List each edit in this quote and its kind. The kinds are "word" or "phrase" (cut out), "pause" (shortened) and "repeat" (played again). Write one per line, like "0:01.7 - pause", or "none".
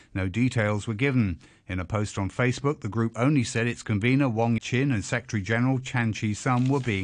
0:04.6 - word